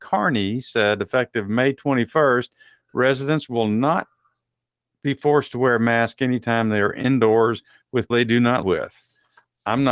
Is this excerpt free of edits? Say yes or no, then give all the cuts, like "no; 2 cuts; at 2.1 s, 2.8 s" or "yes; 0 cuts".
no; 2 cuts; at 8.1 s, 8.6 s